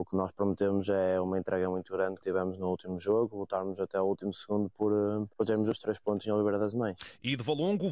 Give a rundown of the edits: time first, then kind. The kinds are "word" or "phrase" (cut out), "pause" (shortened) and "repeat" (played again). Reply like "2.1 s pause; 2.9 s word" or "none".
2.2 s word